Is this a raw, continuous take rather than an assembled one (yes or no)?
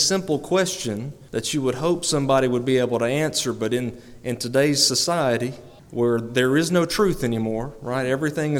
no